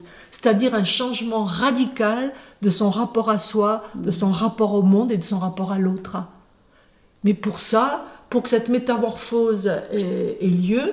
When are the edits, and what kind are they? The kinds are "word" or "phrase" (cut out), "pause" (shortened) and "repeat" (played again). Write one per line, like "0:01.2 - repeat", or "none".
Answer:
none